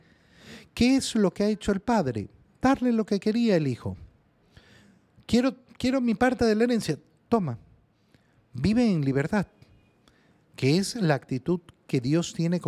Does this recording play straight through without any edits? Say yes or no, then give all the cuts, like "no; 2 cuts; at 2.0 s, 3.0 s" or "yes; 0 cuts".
yes; 0 cuts